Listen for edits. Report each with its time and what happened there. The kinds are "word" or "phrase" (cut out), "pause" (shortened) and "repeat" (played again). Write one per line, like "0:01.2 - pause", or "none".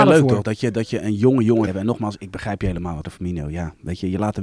0:01.7 - word
0:02.2 - word
0:03.0 - word

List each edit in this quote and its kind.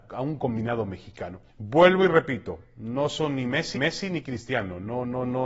0:01.5 - pause
0:03.7 - repeat

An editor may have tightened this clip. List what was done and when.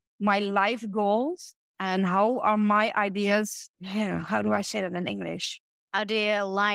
0:03.7 - word

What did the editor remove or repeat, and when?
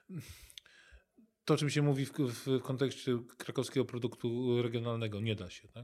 none

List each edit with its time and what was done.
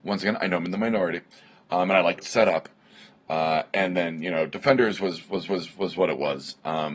0:02.2 - word
0:05.5 - repeat

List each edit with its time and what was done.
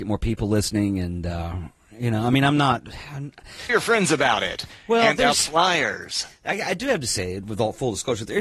0:03.7 - word

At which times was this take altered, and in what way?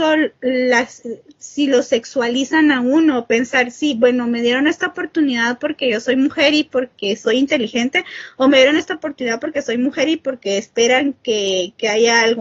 none

